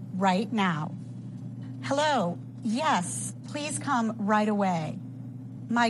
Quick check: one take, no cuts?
yes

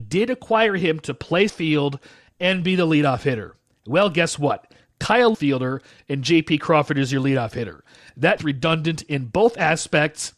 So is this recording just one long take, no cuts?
no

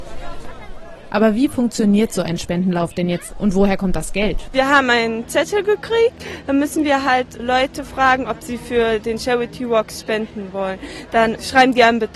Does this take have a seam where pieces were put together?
yes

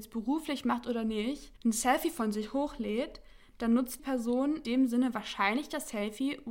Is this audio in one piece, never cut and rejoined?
no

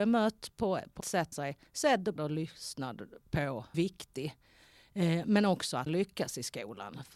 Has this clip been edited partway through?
yes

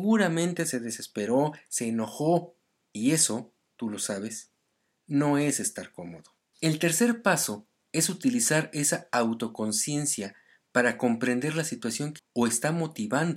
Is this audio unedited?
no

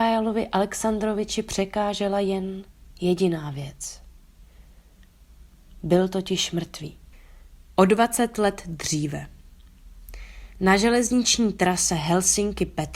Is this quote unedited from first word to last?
yes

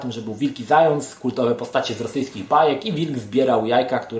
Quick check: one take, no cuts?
yes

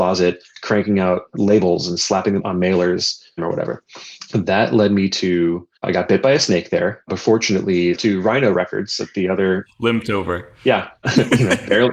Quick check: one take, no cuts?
no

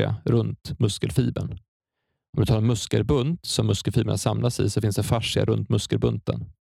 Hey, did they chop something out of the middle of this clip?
no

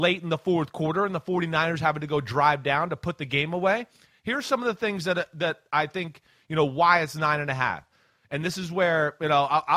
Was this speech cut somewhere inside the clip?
no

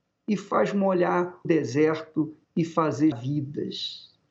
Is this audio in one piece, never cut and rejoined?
no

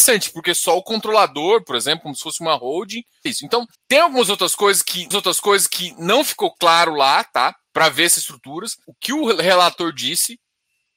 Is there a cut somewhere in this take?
yes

